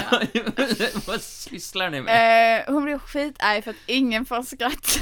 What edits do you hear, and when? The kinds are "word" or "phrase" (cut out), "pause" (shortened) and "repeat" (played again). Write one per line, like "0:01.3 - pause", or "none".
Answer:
none